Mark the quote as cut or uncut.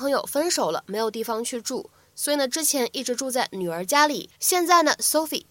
cut